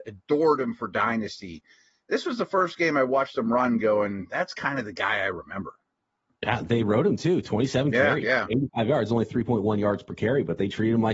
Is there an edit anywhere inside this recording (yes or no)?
no